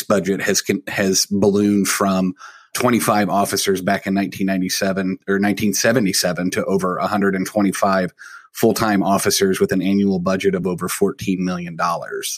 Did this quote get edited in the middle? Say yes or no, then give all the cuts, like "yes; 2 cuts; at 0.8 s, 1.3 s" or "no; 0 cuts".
no; 0 cuts